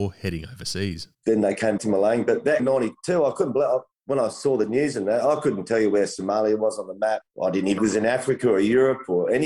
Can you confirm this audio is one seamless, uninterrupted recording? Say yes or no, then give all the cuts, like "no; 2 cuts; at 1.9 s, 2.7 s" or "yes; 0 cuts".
no; 4 cuts; at 1.1 s, 1.8 s, 2.6 s, 7.8 s